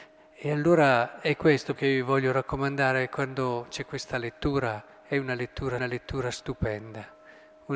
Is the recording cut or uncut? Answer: cut